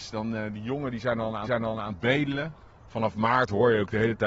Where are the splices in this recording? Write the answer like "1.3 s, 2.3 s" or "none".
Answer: 1.4 s